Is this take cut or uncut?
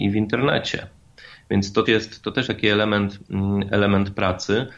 cut